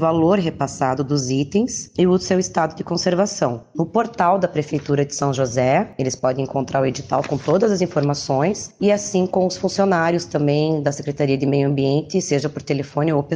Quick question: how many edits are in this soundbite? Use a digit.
0